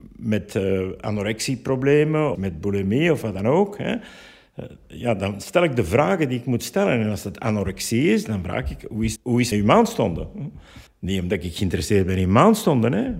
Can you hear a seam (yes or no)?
yes